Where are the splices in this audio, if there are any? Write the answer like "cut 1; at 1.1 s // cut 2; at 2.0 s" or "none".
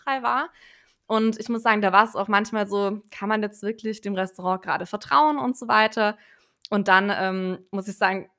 none